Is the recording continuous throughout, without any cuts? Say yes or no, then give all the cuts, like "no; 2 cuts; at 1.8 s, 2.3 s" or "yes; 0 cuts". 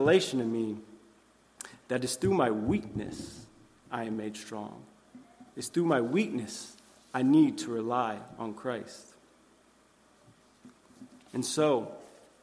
yes; 0 cuts